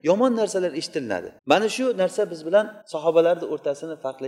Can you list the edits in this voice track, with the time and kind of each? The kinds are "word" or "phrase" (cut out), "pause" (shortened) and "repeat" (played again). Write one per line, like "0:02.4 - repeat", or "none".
0:01.4 - pause
0:02.8 - pause